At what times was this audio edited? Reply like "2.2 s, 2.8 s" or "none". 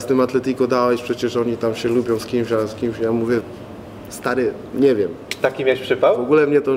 none